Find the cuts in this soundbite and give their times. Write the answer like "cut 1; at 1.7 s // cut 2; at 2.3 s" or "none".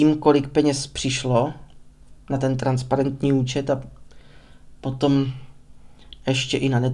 none